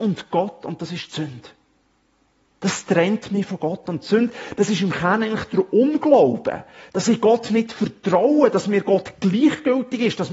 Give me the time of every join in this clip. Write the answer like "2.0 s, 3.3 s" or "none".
none